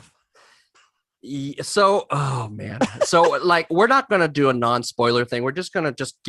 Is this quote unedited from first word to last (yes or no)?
yes